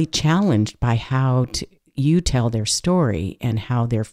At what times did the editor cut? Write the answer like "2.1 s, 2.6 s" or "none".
none